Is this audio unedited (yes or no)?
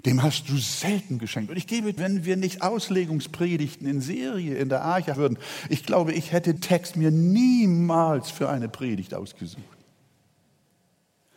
no